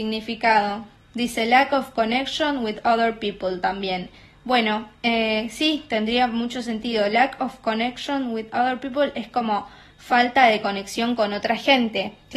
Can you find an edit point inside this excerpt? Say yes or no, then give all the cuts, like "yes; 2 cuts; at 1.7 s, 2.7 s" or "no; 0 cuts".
no; 0 cuts